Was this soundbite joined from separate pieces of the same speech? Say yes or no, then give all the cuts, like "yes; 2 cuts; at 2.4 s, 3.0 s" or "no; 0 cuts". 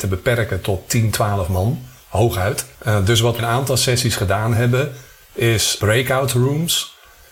yes; 3 cuts; at 2.7 s, 3.4 s, 5.8 s